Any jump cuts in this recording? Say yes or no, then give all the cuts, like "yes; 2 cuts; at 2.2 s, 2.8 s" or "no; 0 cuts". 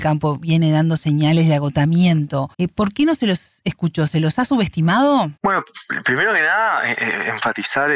yes; 2 cuts; at 2.5 s, 5.4 s